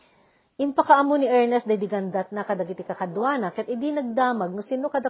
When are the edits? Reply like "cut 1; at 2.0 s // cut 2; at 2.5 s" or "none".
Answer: none